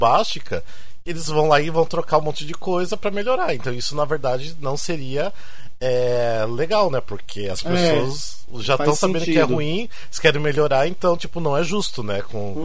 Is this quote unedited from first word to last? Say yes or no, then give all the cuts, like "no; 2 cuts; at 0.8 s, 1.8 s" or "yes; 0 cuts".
yes; 0 cuts